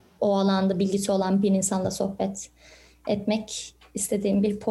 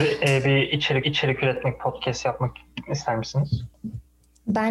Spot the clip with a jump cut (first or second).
second